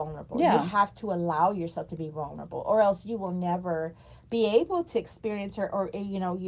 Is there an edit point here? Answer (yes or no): no